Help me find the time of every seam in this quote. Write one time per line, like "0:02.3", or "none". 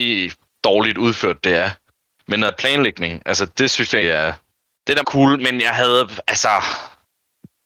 0:02.5
0:04.0
0:05.0
0:05.4